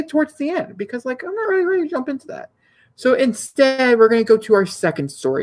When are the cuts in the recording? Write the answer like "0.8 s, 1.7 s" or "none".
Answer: none